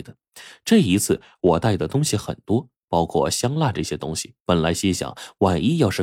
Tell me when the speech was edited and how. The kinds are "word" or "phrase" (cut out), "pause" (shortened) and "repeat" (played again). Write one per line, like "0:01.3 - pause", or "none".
0:04.4 - pause